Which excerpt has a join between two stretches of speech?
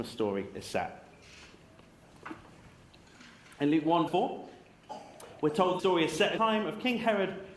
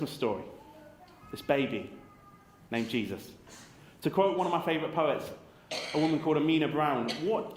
first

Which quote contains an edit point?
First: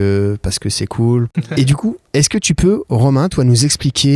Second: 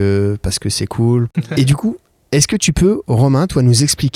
first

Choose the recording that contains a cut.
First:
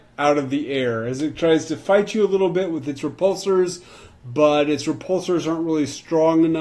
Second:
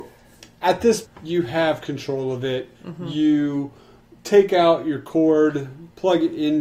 second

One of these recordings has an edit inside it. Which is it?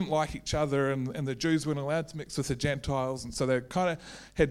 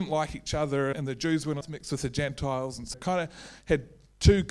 second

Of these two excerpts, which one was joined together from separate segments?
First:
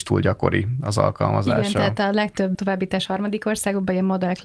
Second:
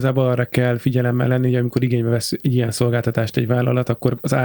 first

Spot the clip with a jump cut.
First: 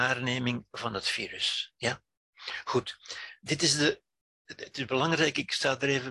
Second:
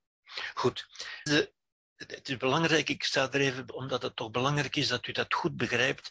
second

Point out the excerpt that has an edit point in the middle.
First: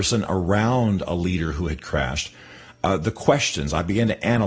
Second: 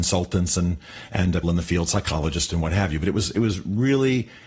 second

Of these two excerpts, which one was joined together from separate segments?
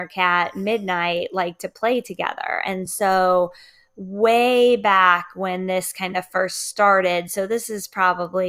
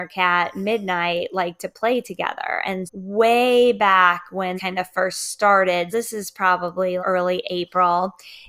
second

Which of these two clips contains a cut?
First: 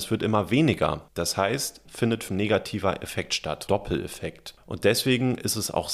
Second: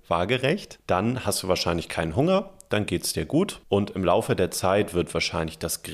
first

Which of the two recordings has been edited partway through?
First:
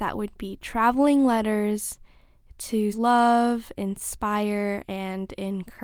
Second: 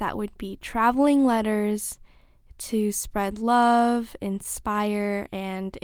first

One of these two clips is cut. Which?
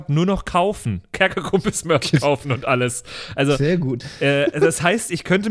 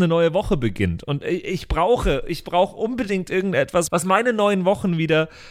second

